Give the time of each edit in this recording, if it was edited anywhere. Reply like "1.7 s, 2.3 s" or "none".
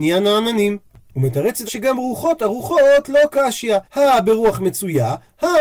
1.7 s, 3.9 s